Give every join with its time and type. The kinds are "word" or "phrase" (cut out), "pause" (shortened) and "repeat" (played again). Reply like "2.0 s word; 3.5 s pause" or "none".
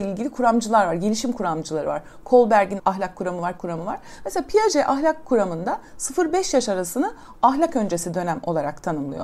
2.8 s word; 3.6 s phrase